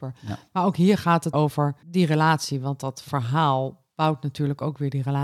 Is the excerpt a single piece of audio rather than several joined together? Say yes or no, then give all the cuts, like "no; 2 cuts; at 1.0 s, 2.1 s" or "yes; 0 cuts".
no; 2 cuts; at 1.3 s, 1.8 s